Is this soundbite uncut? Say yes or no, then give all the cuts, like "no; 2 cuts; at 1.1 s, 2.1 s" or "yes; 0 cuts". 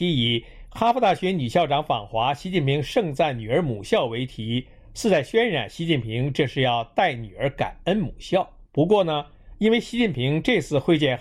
no; 1 cut; at 8.7 s